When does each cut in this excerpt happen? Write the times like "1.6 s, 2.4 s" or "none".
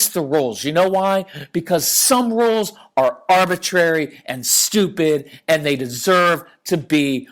none